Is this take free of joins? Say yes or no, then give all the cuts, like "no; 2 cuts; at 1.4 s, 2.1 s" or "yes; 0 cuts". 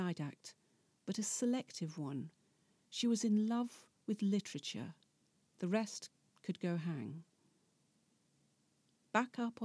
yes; 0 cuts